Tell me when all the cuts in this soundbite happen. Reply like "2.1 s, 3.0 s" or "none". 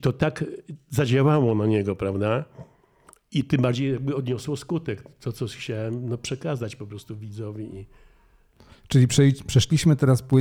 none